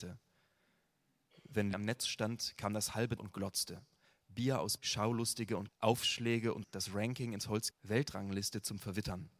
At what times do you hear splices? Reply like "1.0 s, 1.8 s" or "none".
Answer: 1.7 s, 3.2 s, 4.8 s, 5.7 s, 6.6 s, 7.7 s